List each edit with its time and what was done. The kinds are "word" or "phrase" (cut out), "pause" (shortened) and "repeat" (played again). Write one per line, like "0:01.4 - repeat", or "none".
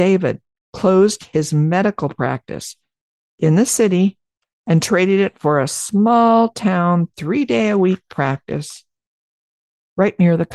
none